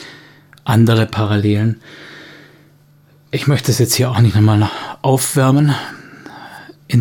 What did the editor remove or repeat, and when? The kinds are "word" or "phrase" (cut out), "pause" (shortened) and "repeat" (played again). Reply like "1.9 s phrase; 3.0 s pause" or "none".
none